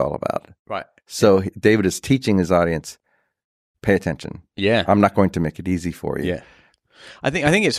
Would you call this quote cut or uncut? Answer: uncut